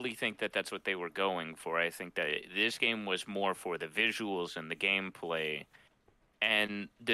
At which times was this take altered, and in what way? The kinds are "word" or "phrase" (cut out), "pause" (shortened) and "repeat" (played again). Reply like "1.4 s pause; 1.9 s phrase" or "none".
none